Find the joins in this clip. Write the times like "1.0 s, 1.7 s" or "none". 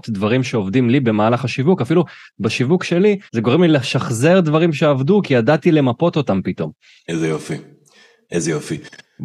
3.3 s